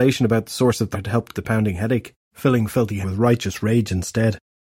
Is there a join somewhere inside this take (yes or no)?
yes